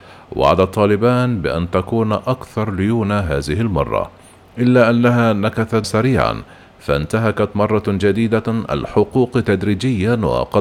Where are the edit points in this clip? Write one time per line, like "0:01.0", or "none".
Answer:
0:05.8